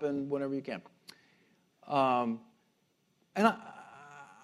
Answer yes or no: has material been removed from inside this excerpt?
no